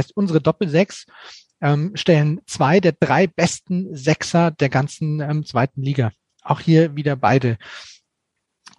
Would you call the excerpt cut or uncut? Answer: uncut